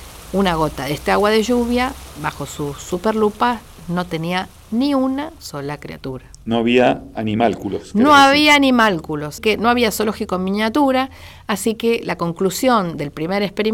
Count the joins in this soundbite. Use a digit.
2